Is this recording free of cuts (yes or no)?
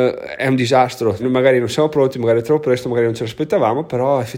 no